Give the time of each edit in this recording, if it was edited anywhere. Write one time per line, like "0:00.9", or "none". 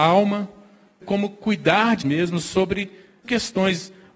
0:01.0
0:02.0
0:03.2